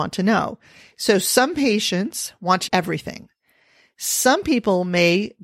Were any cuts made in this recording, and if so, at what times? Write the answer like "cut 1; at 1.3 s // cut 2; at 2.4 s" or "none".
cut 1; at 2.7 s